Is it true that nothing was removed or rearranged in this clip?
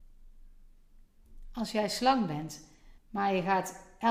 no; 1 cut; at 3.0 s

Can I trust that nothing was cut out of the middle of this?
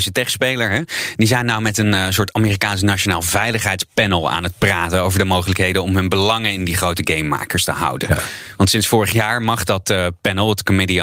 yes; 0 cuts

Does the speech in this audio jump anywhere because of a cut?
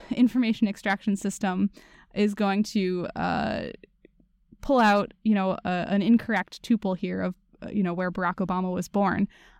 no; 0 cuts

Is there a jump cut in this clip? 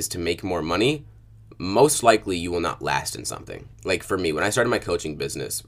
yes; 1 cut; at 3.7 s

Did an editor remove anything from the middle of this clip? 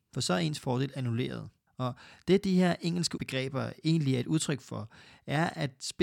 yes; 1 cut; at 1.7 s

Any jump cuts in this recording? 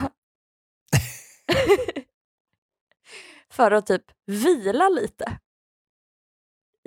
no; 0 cuts

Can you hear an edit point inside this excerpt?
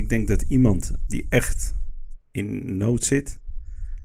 yes; 1 cut; at 2.2 s

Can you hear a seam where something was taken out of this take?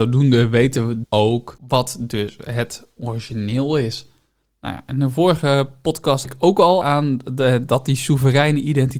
yes; 3 cuts; at 1.0 s, 6.2 s, 6.8 s

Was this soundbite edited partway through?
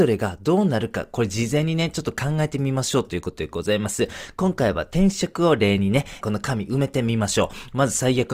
yes; 1 cut; at 6.2 s

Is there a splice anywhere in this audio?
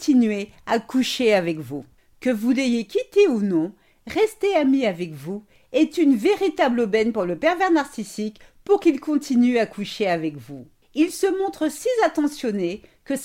no; 0 cuts

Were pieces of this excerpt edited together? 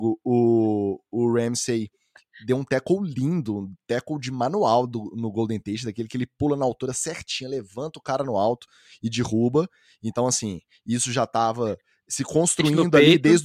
no; 0 cuts

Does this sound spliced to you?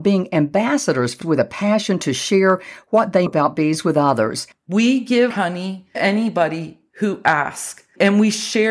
yes; 4 cuts; at 1.2 s, 3.3 s, 5.3 s, 5.9 s

